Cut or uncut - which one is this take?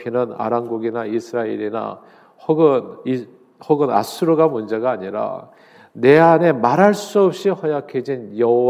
uncut